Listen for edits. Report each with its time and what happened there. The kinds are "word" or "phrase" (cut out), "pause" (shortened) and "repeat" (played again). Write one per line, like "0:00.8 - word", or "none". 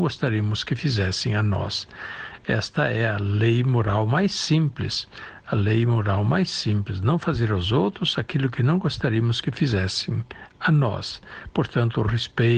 none